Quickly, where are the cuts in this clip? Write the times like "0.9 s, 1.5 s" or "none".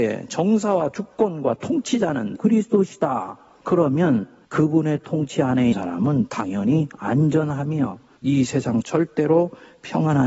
2.4 s, 5.7 s, 8.8 s